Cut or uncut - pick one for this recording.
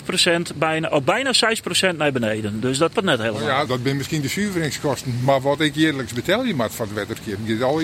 cut